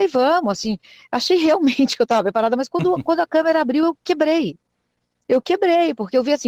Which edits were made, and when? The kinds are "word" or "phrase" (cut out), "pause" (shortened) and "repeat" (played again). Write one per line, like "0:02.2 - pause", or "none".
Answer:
none